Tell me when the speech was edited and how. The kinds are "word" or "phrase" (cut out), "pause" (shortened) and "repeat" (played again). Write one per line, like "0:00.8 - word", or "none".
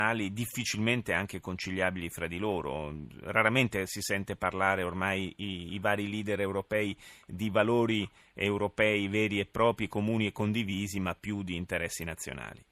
none